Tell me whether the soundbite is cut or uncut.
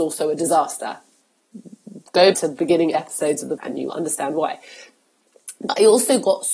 cut